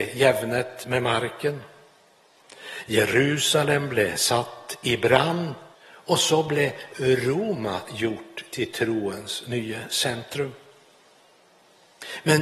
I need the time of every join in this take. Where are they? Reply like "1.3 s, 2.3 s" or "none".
5.7 s